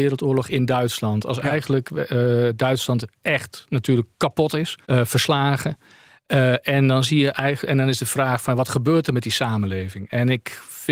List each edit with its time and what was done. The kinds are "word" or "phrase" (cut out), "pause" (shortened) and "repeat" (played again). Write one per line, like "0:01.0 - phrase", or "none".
0:04.8 - pause